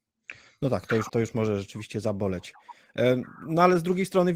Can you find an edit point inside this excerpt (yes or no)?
yes